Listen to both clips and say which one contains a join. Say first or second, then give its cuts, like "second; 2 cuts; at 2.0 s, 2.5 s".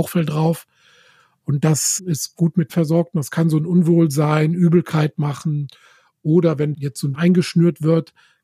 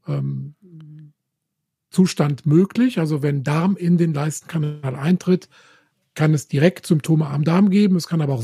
first; 4 cuts; at 2.0 s, 2.7 s, 6.7 s, 7.1 s